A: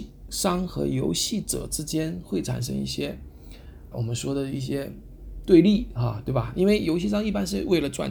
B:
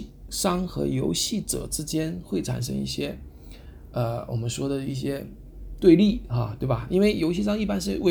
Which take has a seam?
A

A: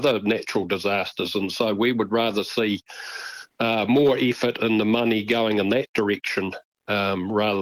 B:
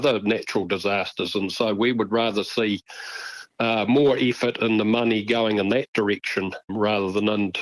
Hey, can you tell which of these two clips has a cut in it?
B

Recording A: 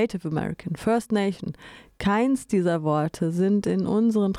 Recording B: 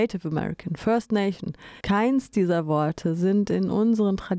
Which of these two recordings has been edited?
B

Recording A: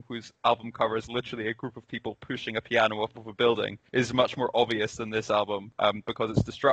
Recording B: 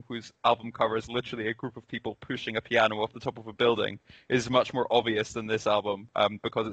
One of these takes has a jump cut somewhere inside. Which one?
A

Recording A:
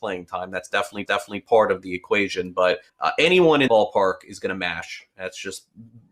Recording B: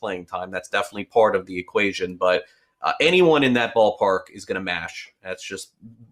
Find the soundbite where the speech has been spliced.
A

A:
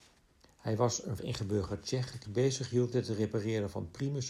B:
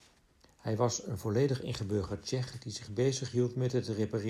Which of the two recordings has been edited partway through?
A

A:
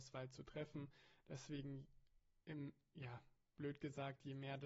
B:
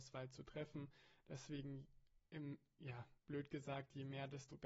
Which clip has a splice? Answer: B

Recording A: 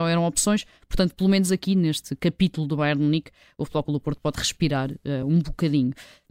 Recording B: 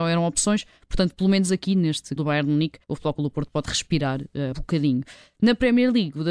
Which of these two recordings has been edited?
B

